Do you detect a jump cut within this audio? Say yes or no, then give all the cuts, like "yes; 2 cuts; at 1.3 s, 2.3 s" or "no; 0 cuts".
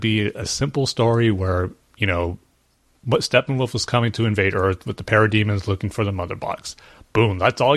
no; 0 cuts